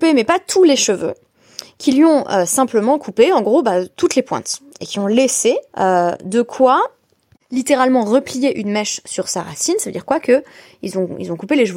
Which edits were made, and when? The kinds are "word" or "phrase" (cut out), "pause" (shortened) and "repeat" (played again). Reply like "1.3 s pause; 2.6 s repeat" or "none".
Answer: 5.7 s pause